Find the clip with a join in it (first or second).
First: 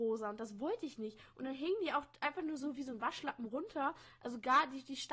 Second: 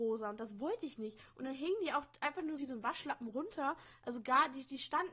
second